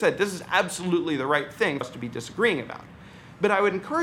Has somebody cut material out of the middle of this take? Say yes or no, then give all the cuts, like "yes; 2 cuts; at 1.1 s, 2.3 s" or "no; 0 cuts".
yes; 1 cut; at 1.8 s